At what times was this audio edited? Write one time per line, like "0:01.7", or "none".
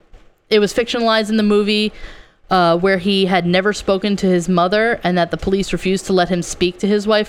none